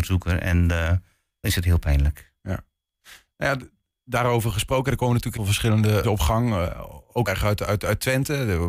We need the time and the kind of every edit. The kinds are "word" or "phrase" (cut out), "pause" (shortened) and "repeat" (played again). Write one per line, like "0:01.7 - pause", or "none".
0:01.4 - phrase
0:05.4 - word
0:06.0 - word
0:07.3 - word